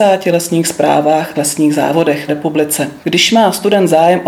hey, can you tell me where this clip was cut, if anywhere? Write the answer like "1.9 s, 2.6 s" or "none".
1.3 s, 2.3 s